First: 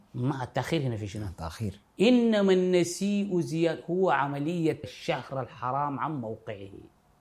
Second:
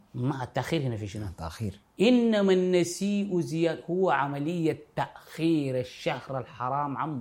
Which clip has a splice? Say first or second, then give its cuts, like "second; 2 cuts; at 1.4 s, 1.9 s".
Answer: first; 1 cut; at 4.8 s